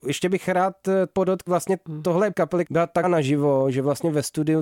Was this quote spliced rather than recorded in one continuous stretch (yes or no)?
yes